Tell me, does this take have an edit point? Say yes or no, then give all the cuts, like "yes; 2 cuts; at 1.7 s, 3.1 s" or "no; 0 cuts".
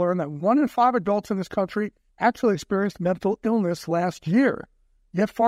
yes; 1 cut; at 2.1 s